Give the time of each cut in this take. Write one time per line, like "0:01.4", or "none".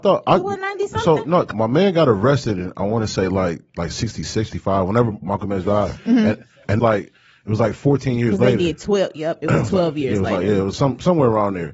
0:01.5
0:03.7
0:04.5
0:05.2
0:06.8
0:10.7

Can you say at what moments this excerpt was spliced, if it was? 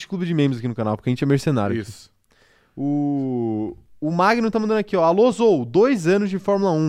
none

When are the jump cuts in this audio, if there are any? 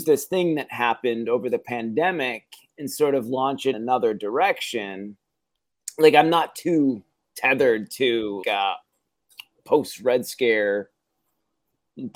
0:03.7
0:08.4

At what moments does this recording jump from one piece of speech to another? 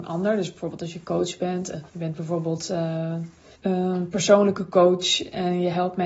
0:01.9
0:03.5

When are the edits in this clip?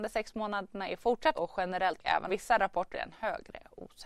0:01.3
0:02.0
0:02.3
0:02.9

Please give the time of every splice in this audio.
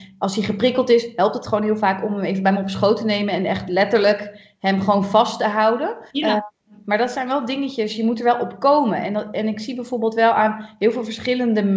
0:06.1

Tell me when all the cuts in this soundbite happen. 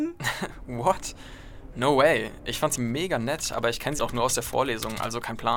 0:02.8
0:04.0

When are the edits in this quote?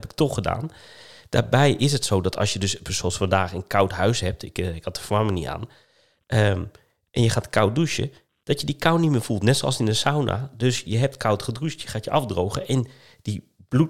none

